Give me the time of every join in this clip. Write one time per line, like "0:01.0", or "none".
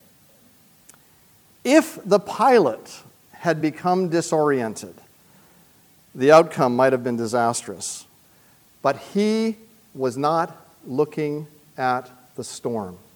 none